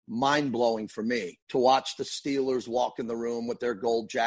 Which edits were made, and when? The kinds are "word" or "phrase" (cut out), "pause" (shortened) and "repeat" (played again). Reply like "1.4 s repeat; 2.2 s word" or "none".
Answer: 1.4 s pause